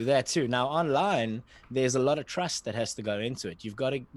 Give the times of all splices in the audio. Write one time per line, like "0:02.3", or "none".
none